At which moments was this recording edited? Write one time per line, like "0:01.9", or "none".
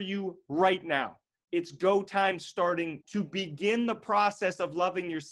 0:03.0